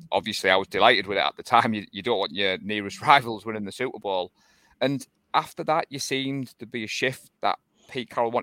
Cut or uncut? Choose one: uncut